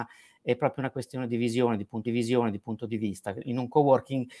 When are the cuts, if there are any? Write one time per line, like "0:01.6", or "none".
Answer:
0:02.1